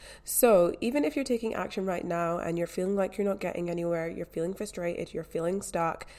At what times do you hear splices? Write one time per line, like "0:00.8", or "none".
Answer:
none